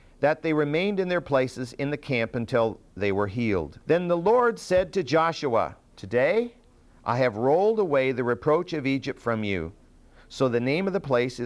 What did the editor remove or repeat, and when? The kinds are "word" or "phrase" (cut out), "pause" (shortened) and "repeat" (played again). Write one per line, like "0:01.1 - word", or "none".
0:03.8 - pause
0:05.9 - pause